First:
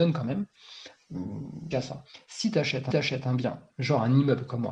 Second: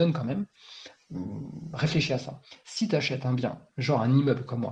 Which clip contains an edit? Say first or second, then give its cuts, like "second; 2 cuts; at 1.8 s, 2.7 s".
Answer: first; 2 cuts; at 1.7 s, 2.9 s